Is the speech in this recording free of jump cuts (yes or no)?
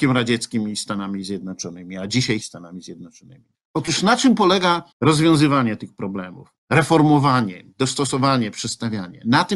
no